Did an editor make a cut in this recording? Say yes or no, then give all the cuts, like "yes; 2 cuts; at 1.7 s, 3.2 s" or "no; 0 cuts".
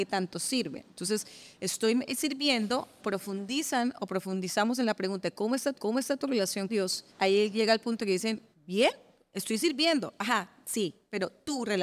yes; 5 cuts; at 3.0 s, 5.7 s, 6.7 s, 7.1 s, 8.5 s